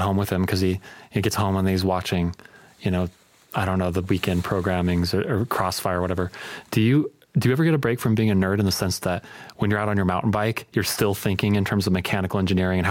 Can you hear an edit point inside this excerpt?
no; 0 cuts

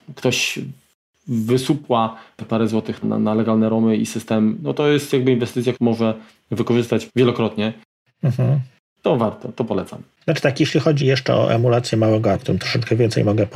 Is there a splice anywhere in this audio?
yes; 5 cuts; at 3.0 s, 5.7 s, 7.1 s, 11.0 s, 12.3 s

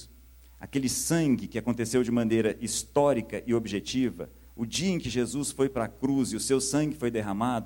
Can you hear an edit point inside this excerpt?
yes; 1 cut; at 4.4 s

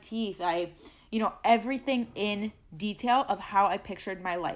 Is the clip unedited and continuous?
yes; 0 cuts

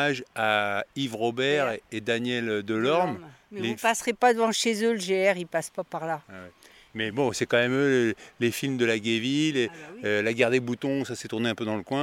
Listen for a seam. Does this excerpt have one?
no; 0 cuts

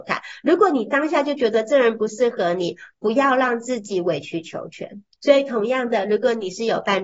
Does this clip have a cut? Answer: no; 0 cuts

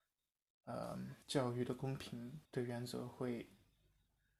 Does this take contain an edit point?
yes; 2 cuts; at 1.2 s, 2.4 s

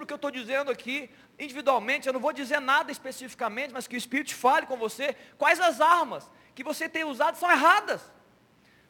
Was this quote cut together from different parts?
no; 0 cuts

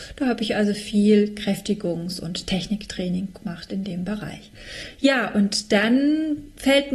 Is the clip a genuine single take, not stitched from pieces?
yes; 0 cuts

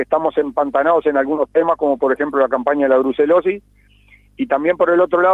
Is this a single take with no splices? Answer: yes; 0 cuts

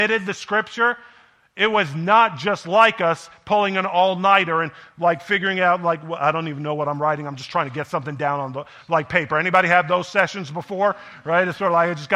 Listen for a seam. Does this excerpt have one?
no; 0 cuts

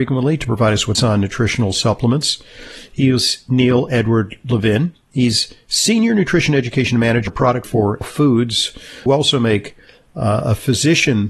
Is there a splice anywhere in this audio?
yes; 5 cuts; at 0.9 s, 7.3 s, 7.6 s, 8.0 s, 9.1 s

